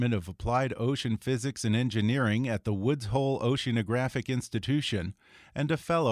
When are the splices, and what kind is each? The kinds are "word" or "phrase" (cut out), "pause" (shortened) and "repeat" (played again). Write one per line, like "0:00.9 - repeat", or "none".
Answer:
none